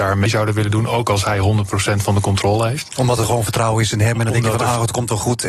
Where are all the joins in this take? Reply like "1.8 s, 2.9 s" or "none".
none